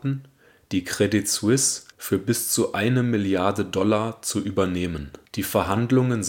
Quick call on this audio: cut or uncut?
cut